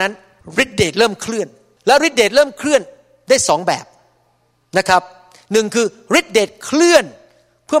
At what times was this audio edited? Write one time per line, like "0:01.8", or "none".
none